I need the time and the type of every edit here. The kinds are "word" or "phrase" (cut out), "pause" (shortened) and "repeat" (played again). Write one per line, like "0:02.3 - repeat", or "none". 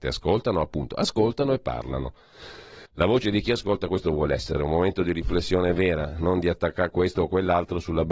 0:02.9 - pause